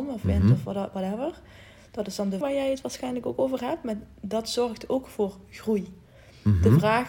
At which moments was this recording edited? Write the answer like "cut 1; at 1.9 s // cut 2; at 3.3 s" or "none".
cut 1; at 2.4 s